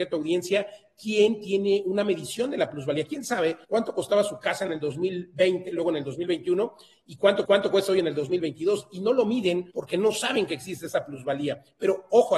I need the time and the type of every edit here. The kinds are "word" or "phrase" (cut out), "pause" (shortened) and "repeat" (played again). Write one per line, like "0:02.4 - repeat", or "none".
0:03.6 - pause
0:07.4 - repeat
0:09.7 - pause